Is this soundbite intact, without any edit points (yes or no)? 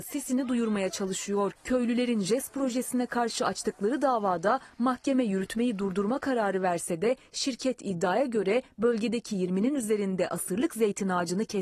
yes